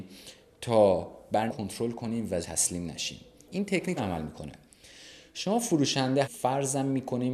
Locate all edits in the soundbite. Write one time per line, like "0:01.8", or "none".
0:01.5
0:02.4
0:03.5
0:04.0
0:06.2